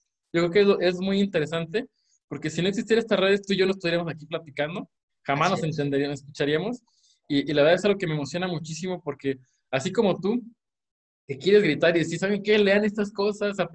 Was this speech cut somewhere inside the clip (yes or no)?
no